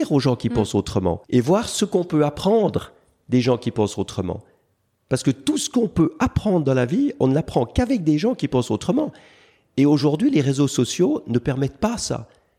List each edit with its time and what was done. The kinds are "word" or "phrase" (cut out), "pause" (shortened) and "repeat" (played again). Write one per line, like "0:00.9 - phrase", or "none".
0:01.2 - pause